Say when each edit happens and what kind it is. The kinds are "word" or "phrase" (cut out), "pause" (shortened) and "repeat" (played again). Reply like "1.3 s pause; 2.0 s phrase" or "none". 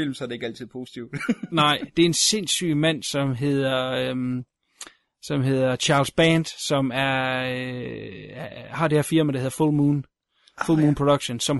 none